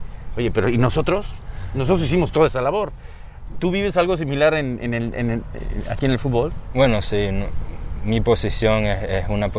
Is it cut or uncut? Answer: uncut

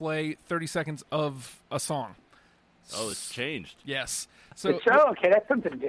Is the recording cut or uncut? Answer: uncut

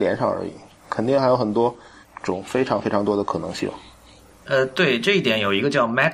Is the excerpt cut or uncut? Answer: cut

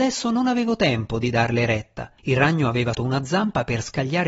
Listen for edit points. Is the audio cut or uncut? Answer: cut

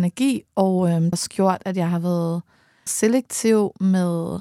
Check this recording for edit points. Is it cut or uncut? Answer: cut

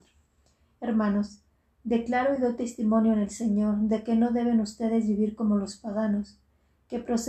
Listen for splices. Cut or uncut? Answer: uncut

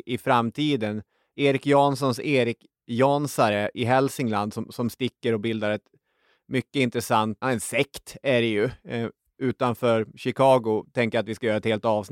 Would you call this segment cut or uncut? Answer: cut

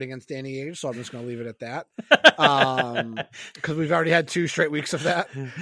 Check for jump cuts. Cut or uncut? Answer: uncut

